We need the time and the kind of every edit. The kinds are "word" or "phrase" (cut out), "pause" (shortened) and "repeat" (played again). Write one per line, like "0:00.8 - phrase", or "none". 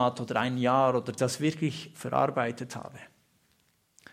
0:01.2 - phrase